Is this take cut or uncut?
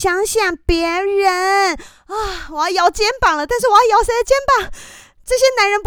uncut